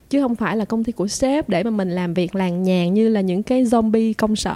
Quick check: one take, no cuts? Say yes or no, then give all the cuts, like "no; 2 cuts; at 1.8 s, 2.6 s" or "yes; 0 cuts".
yes; 0 cuts